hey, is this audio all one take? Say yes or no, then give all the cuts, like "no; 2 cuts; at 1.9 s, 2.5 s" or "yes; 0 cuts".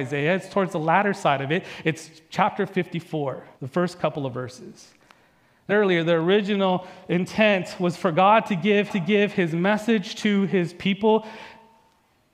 no; 3 cuts; at 3.5 s, 5.7 s, 8.9 s